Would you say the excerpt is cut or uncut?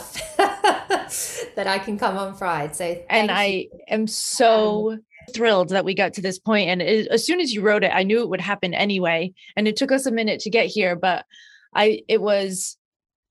cut